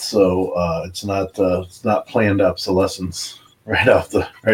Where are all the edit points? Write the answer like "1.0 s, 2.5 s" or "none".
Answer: none